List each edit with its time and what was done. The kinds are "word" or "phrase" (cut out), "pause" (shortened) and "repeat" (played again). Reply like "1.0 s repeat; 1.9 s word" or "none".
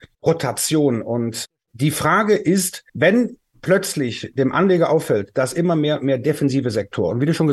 2.9 s pause